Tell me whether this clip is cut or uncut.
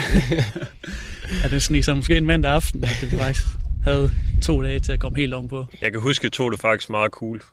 uncut